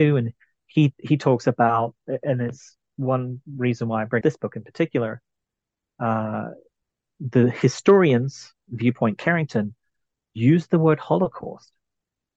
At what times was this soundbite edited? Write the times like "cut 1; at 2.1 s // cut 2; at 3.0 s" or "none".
cut 1; at 4.2 s

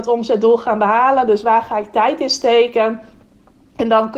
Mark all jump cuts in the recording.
none

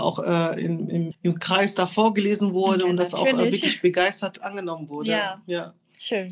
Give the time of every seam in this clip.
cut 1; at 1.1 s

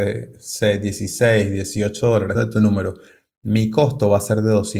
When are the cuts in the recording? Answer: cut 1; at 2.3 s

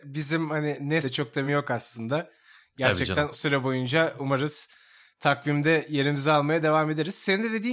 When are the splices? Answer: cut 1; at 1.0 s // cut 2; at 1.5 s // cut 3; at 3.3 s

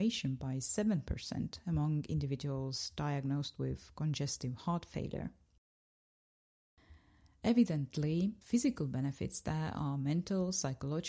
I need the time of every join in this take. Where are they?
cut 1; at 8.4 s

